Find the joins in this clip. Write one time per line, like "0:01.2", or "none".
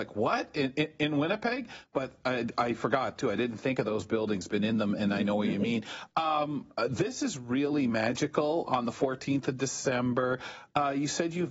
none